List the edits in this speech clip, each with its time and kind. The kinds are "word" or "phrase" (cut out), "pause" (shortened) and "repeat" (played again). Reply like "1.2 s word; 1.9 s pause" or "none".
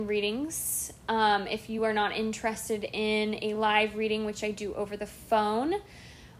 none